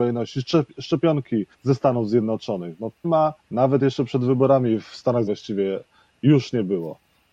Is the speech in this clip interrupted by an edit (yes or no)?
yes